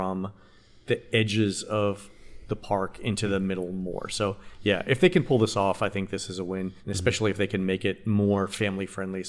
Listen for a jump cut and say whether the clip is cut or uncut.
cut